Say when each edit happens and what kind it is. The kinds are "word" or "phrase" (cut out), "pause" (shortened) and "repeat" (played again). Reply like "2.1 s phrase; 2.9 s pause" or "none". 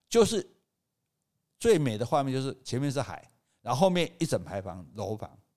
none